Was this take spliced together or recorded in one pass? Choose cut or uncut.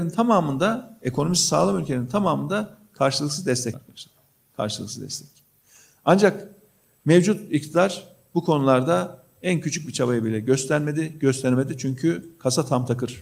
cut